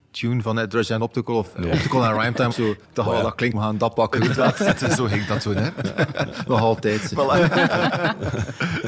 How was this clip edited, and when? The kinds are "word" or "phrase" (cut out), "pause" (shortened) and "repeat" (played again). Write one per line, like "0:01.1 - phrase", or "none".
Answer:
0:02.5 - word
0:02.8 - pause
0:03.5 - word
0:05.0 - word